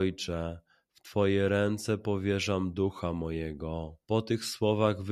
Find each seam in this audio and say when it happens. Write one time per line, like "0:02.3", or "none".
0:04.0